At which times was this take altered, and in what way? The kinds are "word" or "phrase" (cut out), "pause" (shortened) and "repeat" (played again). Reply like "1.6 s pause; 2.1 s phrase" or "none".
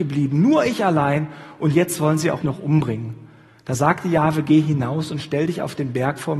2.4 s word